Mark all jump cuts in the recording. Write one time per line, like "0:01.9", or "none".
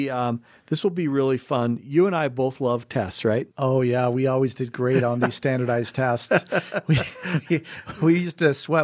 0:03.5